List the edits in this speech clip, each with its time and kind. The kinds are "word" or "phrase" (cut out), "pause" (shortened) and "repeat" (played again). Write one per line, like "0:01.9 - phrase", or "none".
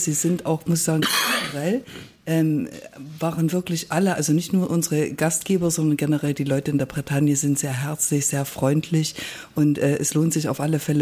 none